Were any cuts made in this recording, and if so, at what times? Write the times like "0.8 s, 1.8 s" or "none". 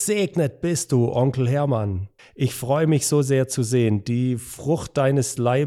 2.2 s